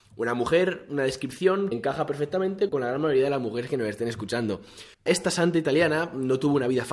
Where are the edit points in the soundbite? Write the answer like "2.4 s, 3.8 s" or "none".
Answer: 1.7 s, 2.7 s, 4.9 s

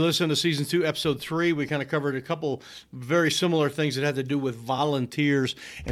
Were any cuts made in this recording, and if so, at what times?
none

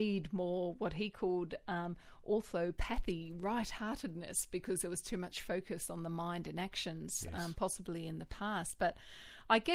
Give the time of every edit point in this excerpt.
none

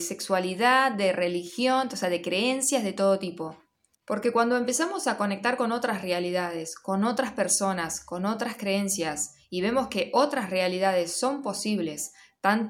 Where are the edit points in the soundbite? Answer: 3.9 s

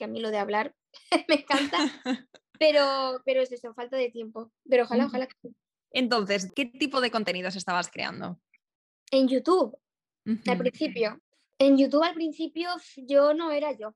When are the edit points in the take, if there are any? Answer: none

